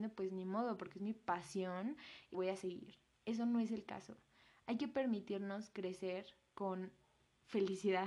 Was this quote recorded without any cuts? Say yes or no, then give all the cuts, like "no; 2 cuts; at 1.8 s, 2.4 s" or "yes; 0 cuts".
no; 1 cut; at 2.3 s